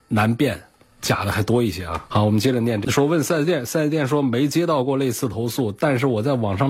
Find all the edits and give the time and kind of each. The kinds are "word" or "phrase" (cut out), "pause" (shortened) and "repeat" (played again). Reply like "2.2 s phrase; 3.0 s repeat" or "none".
none